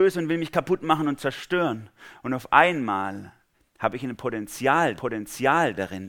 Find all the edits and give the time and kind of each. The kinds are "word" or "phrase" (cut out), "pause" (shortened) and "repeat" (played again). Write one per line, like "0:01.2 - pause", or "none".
0:03.5 - pause
0:05.0 - repeat